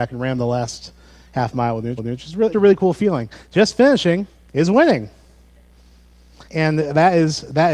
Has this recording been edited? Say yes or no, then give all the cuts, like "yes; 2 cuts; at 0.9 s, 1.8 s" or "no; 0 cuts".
yes; 4 cuts; at 2.0 s, 2.5 s, 4.5 s, 6.5 s